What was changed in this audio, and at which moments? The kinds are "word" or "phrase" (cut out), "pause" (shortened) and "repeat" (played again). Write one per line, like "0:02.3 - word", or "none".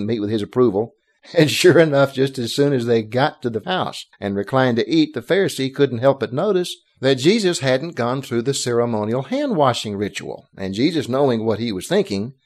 0:01.2 - pause
0:03.6 - word
0:04.1 - pause
0:10.5 - pause